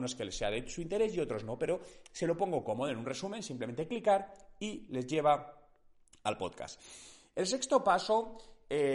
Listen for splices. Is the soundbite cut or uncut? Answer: uncut